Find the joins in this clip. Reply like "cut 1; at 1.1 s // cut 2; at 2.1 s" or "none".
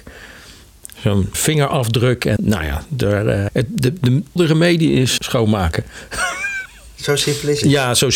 cut 1; at 1.3 s // cut 2; at 2.4 s // cut 3; at 3.5 s // cut 4; at 4.4 s // cut 5; at 5.2 s